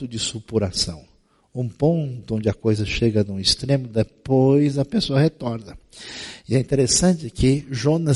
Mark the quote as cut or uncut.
uncut